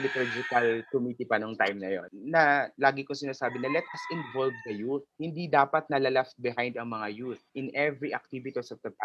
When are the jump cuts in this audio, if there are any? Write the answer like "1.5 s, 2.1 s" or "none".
7.5 s